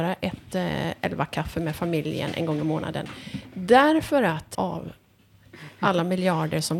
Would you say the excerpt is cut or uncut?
cut